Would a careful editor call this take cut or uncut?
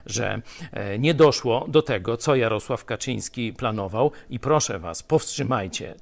uncut